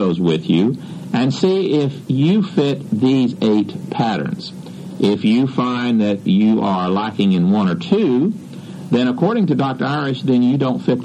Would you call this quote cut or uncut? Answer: uncut